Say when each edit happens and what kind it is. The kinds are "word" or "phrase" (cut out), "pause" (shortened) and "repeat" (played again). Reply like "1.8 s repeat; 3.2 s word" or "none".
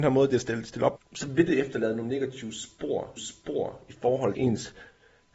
1.0 s phrase; 3.2 s repeat; 4.3 s word